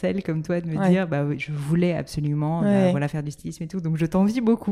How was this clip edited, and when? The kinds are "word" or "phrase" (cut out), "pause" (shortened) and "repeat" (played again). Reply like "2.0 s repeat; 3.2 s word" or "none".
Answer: none

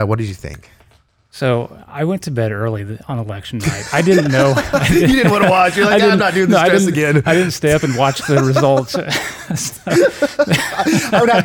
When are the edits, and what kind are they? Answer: none

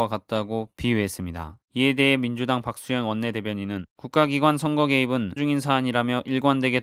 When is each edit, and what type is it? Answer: 1.6 s pause; 3.9 s pause; 5.4 s word

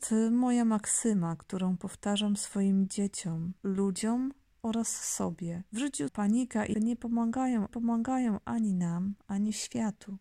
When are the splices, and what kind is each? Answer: 6.1 s phrase; 6.7 s word; 7.7 s repeat

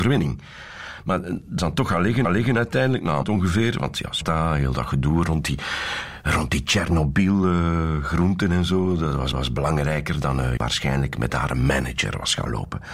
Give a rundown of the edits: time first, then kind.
1.6 s word; 2.2 s repeat; 3.2 s word; 4.2 s word; 9.3 s repeat; 10.6 s phrase

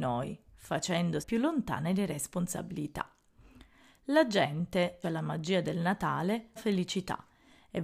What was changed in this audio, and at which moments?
1.2 s word; 5.0 s word; 6.6 s word

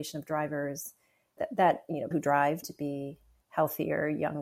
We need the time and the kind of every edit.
1.4 s word; 2.1 s word; 2.6 s word

